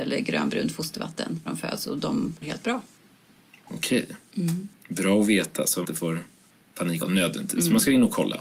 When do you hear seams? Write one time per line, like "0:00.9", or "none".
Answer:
0:01.5
0:02.4
0:05.8
0:07.0